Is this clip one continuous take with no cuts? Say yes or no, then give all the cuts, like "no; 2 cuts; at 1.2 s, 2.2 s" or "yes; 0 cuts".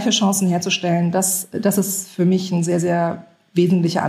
yes; 0 cuts